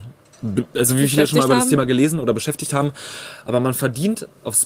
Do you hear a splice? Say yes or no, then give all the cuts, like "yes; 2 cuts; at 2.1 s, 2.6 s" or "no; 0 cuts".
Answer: no; 0 cuts